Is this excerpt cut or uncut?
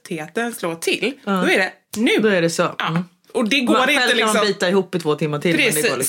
uncut